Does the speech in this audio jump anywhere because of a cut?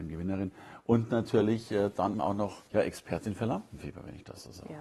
yes; 2 cuts; at 2.1 s, 2.7 s

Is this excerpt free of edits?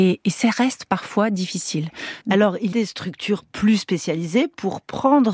no; 2 cuts; at 2.2 s, 2.7 s

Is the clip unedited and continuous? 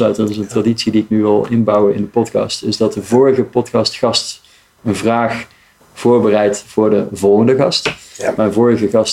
yes; 0 cuts

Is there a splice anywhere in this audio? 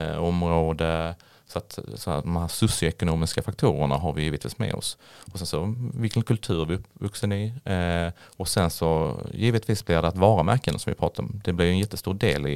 no; 0 cuts

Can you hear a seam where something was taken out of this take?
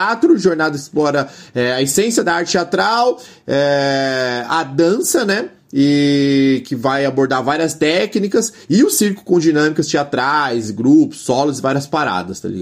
no; 0 cuts

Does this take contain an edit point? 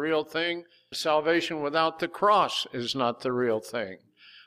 yes; 1 cut; at 0.9 s

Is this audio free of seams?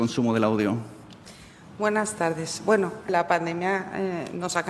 no; 1 cut; at 3.1 s

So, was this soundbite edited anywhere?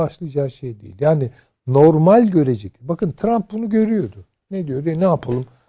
no; 0 cuts

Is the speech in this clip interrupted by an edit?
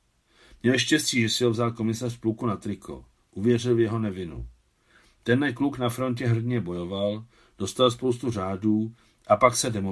no; 0 cuts

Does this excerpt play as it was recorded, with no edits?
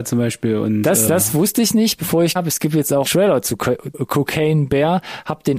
no; 4 cuts; at 1.1 s, 2.4 s, 3.1 s, 3.9 s

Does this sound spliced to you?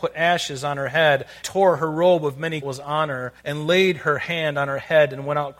yes; 3 cuts; at 1.4 s, 2.6 s, 3.4 s

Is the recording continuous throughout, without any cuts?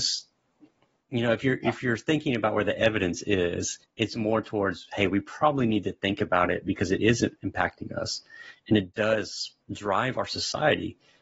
no; 2 cuts; at 3.8 s, 9.6 s

